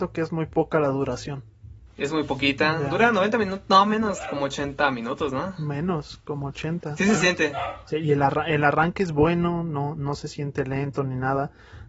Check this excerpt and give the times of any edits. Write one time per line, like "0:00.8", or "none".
none